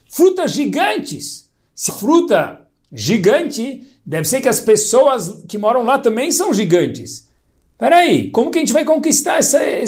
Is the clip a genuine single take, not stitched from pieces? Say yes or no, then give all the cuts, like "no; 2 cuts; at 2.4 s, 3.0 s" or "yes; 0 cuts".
no; 1 cut; at 1.9 s